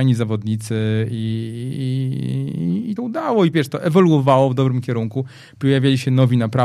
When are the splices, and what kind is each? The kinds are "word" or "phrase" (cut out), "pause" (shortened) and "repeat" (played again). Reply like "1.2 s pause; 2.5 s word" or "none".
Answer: 3.0 s word; 3.5 s word